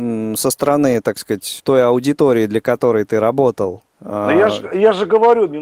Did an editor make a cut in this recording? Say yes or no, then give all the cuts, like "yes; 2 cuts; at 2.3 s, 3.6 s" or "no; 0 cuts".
yes; 2 cuts; at 1.6 s, 3.9 s